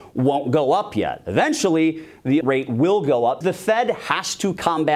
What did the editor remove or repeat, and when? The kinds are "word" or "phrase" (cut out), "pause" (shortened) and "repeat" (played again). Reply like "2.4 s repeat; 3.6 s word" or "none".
2.4 s word; 3.4 s word